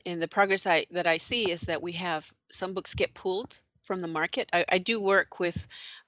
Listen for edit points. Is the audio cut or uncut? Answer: uncut